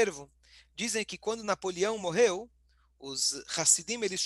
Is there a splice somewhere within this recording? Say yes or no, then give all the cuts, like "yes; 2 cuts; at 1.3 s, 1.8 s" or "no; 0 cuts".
no; 0 cuts